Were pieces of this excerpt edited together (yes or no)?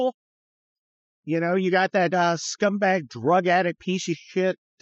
no